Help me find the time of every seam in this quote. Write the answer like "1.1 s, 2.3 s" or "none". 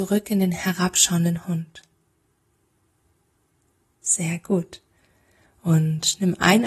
none